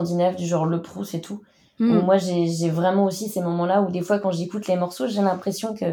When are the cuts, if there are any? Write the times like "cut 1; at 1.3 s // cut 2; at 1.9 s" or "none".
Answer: none